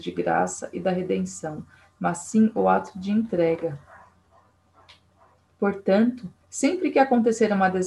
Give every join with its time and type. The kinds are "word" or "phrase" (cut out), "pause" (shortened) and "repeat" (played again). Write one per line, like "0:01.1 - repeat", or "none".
0:06.4 - pause